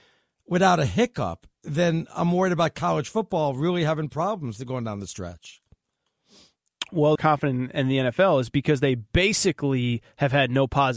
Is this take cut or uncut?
cut